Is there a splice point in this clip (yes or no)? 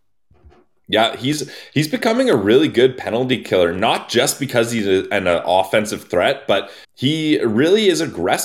yes